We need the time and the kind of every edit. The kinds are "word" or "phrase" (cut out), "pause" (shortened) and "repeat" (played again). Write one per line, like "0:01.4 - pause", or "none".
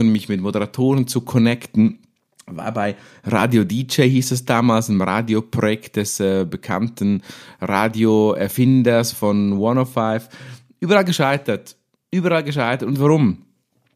none